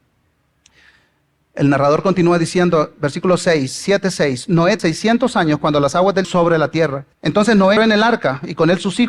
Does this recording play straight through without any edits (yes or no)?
no